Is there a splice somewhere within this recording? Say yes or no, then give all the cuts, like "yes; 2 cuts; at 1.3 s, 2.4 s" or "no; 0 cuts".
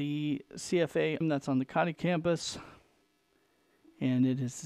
yes; 2 cuts; at 1.2 s, 1.9 s